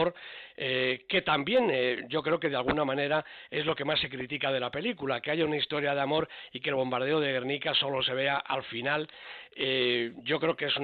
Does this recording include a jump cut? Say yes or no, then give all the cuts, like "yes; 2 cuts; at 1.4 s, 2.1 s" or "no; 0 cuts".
no; 0 cuts